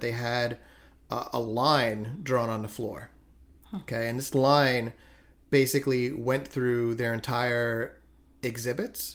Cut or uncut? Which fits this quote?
uncut